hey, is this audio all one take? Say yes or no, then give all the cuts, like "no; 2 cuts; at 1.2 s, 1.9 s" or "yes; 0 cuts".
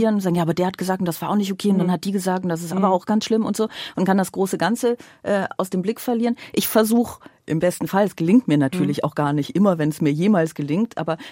no; 1 cut; at 5.6 s